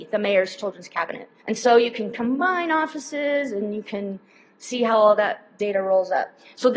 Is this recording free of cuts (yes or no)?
no